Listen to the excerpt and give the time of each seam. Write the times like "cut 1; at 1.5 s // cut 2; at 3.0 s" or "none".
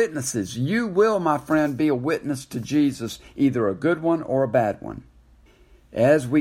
cut 1; at 5.5 s